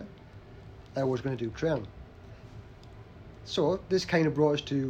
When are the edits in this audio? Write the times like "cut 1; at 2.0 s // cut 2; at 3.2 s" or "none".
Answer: cut 1; at 1.5 s